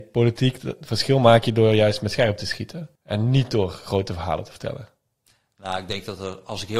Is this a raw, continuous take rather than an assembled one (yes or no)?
no